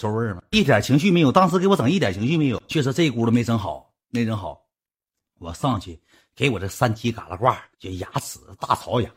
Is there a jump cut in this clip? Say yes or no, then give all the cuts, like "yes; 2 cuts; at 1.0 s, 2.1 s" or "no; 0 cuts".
yes; 2 cuts; at 2.7 s, 7.7 s